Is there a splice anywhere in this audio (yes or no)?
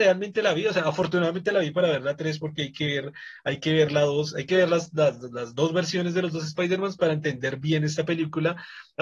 no